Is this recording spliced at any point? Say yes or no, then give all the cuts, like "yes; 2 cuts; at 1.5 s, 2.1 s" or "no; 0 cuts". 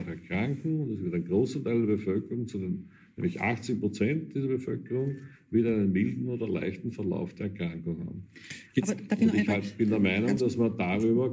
no; 0 cuts